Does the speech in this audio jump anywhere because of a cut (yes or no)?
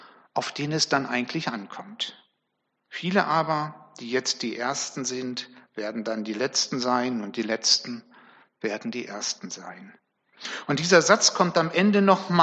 no